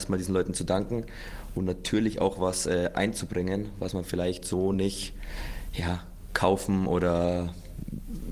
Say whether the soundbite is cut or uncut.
uncut